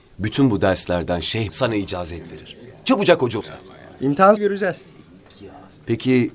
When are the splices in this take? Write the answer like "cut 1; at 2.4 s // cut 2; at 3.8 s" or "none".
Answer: cut 1; at 1.5 s // cut 2; at 3.4 s // cut 3; at 4.4 s